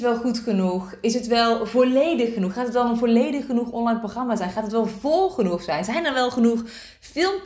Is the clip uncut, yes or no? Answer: yes